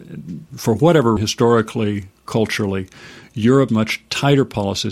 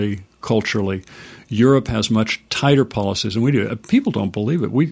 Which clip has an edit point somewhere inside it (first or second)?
first